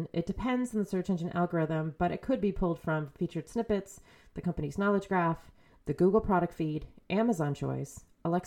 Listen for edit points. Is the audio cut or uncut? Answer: uncut